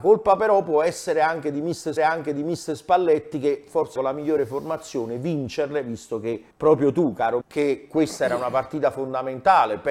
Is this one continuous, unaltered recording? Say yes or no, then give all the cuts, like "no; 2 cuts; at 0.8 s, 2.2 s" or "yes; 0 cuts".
no; 4 cuts; at 2.0 s, 4.0 s, 6.5 s, 7.4 s